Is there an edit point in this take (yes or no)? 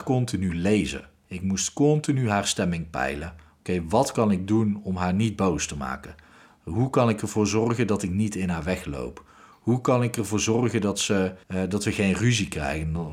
yes